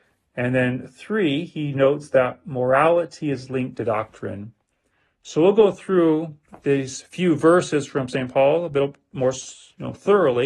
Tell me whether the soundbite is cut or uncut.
uncut